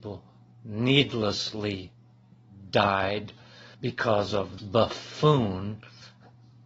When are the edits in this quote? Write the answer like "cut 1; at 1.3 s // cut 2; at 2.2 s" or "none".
cut 1; at 3.7 s // cut 2; at 4.6 s